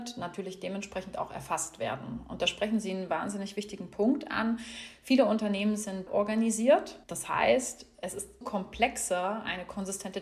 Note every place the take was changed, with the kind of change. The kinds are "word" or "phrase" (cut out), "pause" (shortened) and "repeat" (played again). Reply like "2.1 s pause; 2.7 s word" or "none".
6.1 s word; 7.0 s pause; 8.4 s word